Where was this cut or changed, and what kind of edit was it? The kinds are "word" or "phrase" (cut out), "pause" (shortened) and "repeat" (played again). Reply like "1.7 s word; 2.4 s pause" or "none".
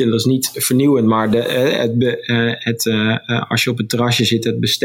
none